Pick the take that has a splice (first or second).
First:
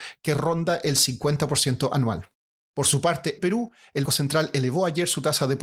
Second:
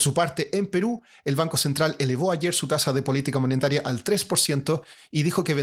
first